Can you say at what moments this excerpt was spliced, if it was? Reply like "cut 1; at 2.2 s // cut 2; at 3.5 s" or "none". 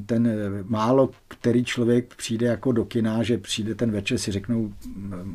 cut 1; at 1.2 s